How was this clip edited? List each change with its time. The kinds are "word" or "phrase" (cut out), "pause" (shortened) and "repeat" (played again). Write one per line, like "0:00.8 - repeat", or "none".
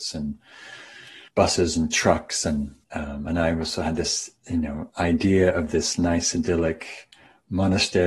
0:01.3 - pause
0:02.8 - pause
0:04.4 - pause